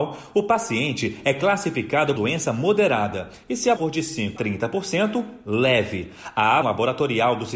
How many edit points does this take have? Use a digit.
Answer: 4